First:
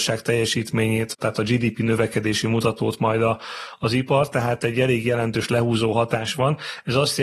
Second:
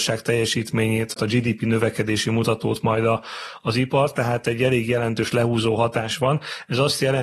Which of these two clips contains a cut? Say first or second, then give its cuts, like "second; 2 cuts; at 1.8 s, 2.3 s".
second; 1 cut; at 1.2 s